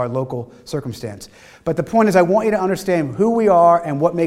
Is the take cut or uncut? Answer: uncut